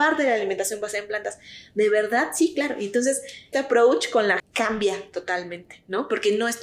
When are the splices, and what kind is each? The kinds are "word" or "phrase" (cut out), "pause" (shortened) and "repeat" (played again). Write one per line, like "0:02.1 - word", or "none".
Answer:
0:03.5 - phrase
0:04.4 - word

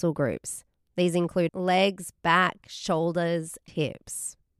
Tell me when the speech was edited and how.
0:01.5 - word
0:03.7 - word

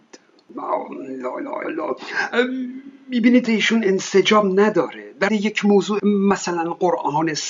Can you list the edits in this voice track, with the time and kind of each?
0:01.6 - word
0:03.5 - word
0:05.3 - word
0:06.0 - word

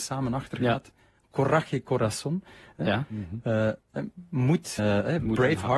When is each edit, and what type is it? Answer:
0:04.8 - word

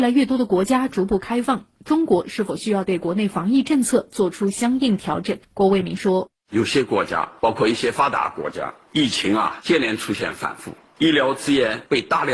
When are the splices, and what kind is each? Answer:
0:05.4 - pause

